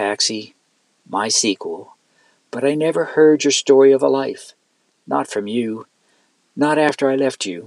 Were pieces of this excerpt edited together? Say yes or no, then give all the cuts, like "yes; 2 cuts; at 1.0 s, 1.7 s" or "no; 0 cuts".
no; 0 cuts